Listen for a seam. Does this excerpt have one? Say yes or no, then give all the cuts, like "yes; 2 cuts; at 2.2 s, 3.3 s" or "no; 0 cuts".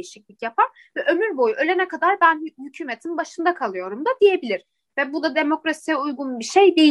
no; 0 cuts